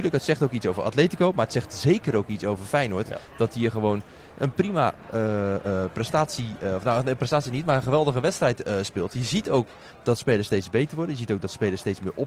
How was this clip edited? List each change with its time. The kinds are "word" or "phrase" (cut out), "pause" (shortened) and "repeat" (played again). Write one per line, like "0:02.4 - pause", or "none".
none